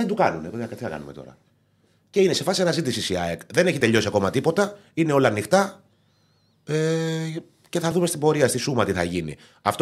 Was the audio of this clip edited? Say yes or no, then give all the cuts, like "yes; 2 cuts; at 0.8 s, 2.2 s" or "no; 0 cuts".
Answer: no; 0 cuts